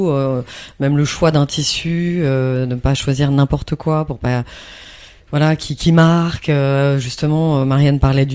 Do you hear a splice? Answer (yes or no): no